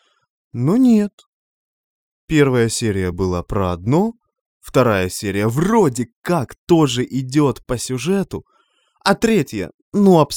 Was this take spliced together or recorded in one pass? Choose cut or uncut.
uncut